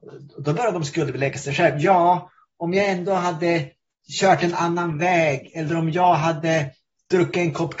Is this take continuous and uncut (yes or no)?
yes